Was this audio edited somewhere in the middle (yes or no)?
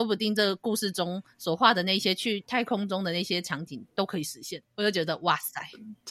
yes